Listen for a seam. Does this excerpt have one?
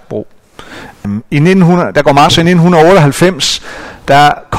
yes; 2 cuts; at 1.0 s, 2.3 s

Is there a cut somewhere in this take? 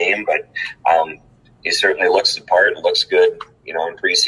no; 0 cuts

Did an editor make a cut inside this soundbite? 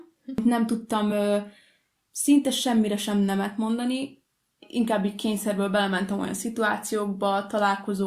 no; 0 cuts

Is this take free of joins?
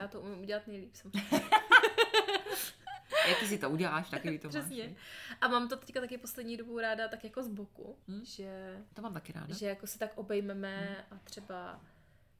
no; 2 cuts; at 8.0 s, 8.9 s

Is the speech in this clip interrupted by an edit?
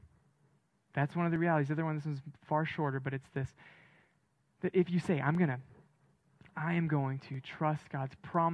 no; 0 cuts

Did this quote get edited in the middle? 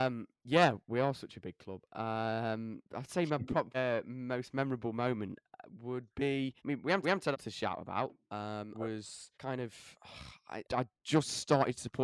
yes; 7 cuts; at 3.7 s, 6.6 s, 7.0 s, 7.3 s, 8.7 s, 9.3 s, 10.6 s

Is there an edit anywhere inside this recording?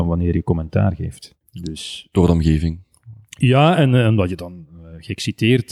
yes; 1 cut; at 1.4 s

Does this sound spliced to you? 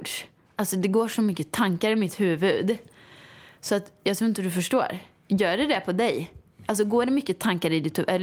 no; 0 cuts

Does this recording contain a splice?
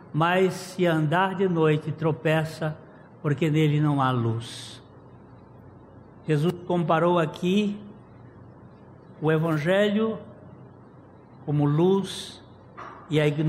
no; 0 cuts

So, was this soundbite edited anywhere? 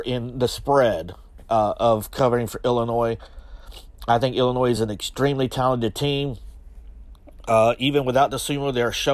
no; 0 cuts

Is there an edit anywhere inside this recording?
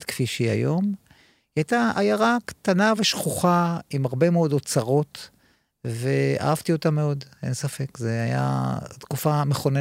no; 0 cuts

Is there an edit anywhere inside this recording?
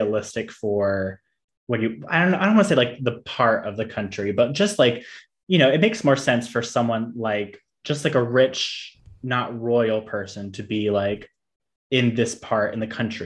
no; 0 cuts

